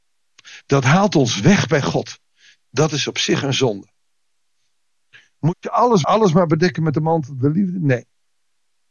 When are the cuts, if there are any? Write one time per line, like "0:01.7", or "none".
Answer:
0:06.0

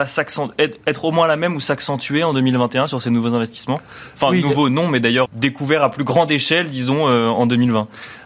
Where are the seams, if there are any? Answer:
0:05.3

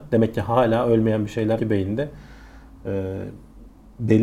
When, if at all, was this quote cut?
0:01.6

